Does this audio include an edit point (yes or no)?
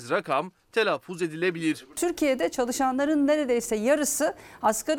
no